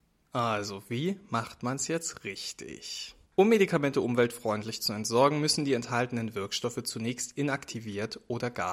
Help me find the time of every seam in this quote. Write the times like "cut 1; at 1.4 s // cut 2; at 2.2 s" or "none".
cut 1; at 3.2 s